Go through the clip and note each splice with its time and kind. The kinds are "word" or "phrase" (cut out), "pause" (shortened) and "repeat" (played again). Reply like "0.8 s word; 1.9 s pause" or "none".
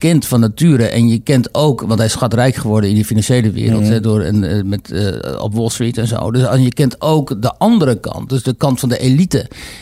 none